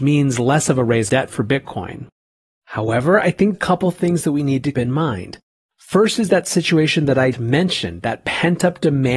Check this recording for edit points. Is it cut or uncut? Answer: cut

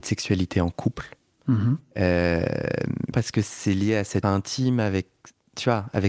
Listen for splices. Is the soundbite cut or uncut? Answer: cut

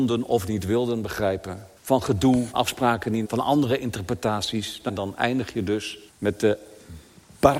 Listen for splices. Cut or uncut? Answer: cut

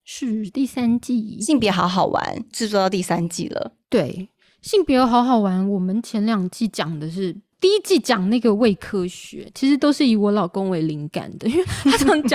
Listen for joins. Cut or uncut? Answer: uncut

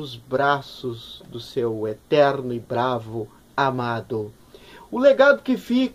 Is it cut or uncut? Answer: uncut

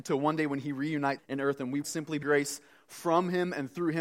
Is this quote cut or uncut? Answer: cut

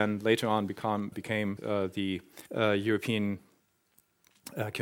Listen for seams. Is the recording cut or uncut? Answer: cut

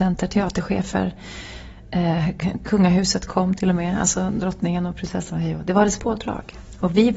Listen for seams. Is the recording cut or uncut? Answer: cut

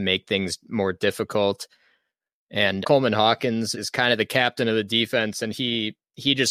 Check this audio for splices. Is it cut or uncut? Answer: cut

